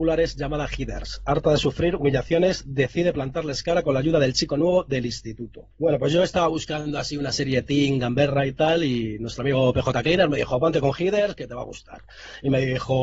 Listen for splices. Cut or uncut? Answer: cut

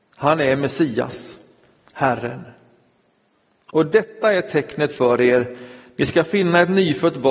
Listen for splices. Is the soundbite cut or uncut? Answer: uncut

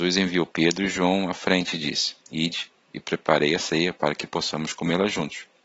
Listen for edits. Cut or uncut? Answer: uncut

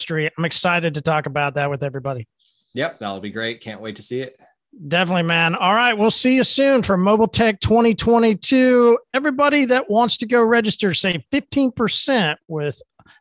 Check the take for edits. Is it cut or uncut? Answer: uncut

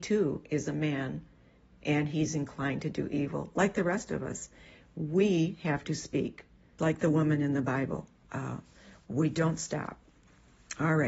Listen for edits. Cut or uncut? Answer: cut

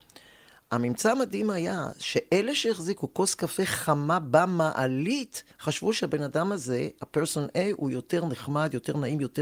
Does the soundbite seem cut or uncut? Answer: cut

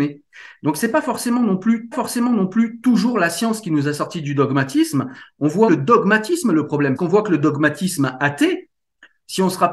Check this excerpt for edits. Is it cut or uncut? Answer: cut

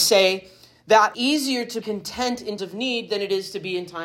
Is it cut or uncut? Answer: cut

